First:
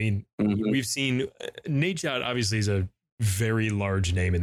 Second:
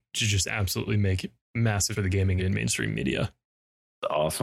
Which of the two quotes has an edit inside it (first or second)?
second